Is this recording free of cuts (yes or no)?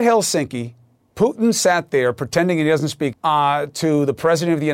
no